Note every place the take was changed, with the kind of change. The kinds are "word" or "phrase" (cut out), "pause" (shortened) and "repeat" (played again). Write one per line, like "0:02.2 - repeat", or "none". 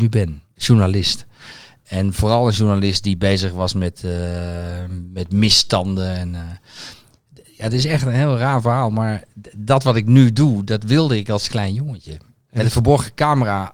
none

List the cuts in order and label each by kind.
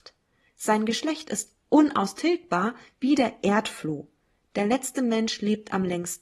none

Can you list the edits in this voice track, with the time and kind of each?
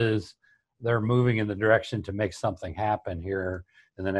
none

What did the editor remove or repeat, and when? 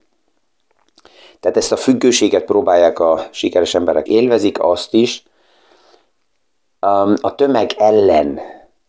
0:04.1 - phrase

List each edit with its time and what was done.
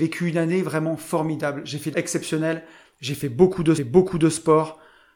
0:01.9 - word
0:03.8 - repeat

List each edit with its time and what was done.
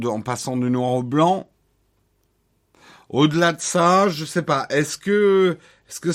none

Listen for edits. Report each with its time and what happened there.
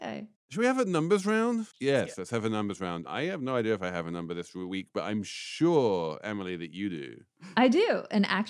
0:01.7 - pause

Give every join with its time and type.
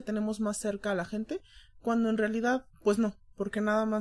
0:02.7 - pause

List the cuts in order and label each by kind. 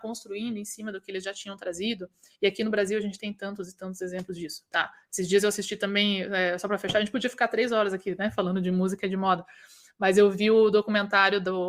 none

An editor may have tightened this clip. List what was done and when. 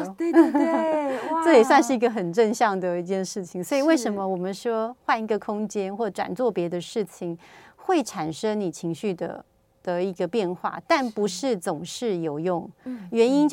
none

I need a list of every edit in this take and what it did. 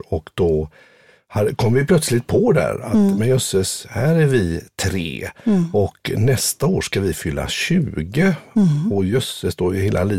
none

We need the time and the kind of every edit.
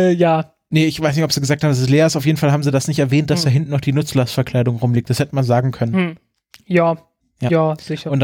none

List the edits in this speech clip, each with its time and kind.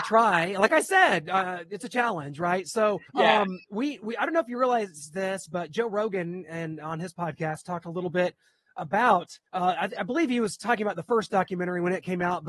0:03.1 - pause
0:09.5 - pause

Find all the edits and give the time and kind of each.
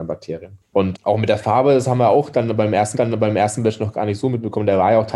0:00.9 - word
0:02.9 - repeat

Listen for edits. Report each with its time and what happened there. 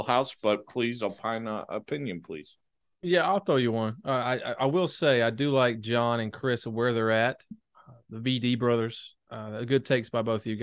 none

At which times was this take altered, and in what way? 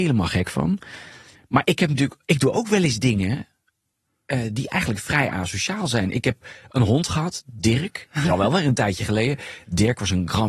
none

